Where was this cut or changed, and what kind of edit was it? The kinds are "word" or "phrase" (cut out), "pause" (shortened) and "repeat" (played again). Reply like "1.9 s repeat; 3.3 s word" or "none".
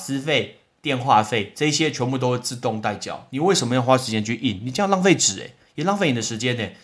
none